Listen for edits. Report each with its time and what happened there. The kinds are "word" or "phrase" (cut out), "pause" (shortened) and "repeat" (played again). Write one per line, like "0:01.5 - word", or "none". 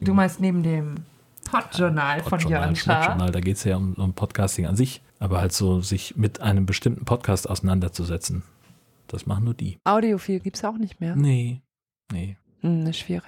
0:05.1 - pause